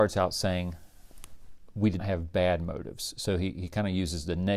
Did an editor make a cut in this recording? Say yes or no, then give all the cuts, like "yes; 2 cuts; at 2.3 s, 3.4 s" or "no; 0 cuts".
yes; 1 cut; at 2.0 s